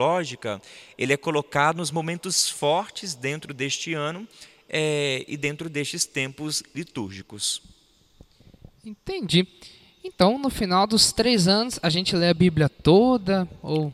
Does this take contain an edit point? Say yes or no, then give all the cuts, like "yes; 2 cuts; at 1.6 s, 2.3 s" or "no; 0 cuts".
no; 0 cuts